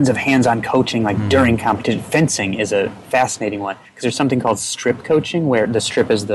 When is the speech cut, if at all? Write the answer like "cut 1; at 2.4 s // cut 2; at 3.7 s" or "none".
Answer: cut 1; at 3.8 s